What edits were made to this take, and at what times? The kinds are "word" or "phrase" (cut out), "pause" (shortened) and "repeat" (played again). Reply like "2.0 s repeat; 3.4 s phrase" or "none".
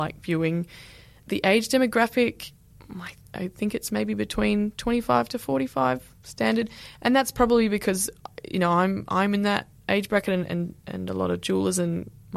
6.2 s pause